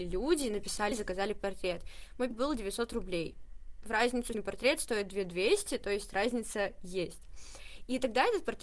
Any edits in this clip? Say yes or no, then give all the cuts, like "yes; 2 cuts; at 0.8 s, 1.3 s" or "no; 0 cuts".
yes; 3 cuts; at 0.9 s, 2.3 s, 4.3 s